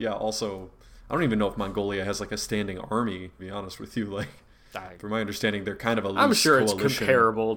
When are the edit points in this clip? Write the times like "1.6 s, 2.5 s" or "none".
3.4 s